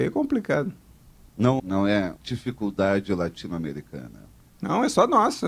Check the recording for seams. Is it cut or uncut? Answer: cut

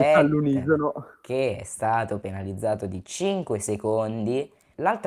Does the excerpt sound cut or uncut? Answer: uncut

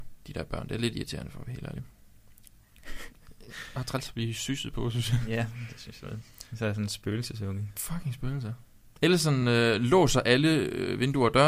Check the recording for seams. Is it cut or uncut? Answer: uncut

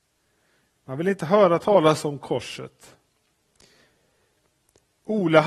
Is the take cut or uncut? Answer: uncut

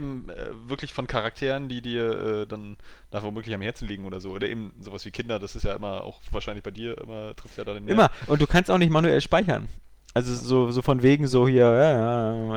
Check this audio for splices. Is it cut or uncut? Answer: uncut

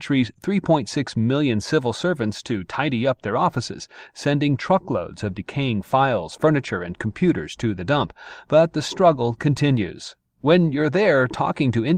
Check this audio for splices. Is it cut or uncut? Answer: uncut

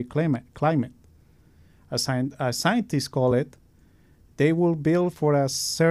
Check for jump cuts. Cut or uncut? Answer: uncut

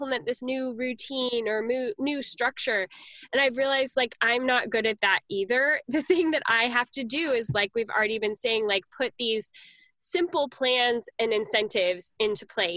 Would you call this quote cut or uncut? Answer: uncut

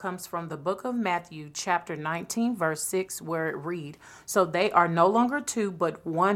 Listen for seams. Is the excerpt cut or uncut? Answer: uncut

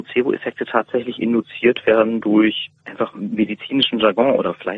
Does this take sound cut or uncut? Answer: cut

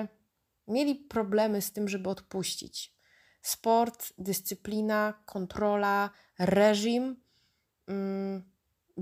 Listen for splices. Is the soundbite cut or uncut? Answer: uncut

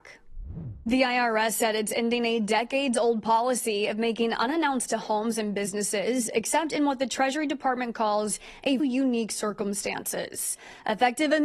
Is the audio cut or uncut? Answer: cut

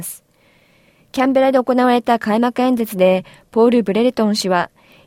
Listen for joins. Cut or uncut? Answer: uncut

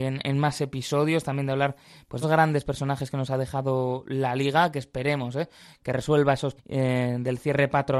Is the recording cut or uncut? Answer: cut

